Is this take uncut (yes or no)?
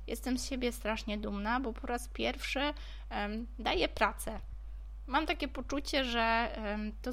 yes